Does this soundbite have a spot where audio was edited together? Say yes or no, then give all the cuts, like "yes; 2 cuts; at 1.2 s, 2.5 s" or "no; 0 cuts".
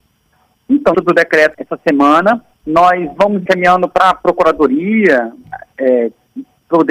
yes; 4 cuts; at 0.9 s, 1.5 s, 2.5 s, 3.5 s